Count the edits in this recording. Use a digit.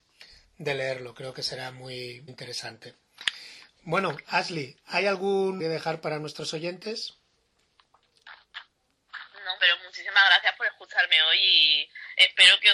3